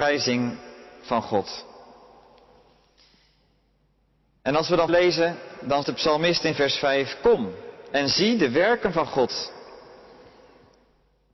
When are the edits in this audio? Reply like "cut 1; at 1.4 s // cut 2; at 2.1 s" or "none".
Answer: cut 1; at 4.9 s // cut 2; at 5.8 s